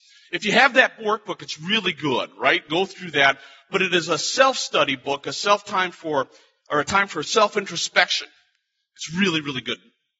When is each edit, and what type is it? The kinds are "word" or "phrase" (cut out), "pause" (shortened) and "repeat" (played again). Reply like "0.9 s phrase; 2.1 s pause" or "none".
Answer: none